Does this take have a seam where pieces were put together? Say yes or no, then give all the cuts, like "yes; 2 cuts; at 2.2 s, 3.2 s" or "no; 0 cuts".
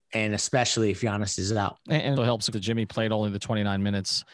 yes; 3 cuts; at 1.8 s, 2.2 s, 2.5 s